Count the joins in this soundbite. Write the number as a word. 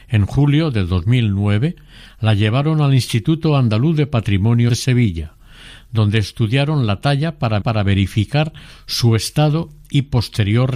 two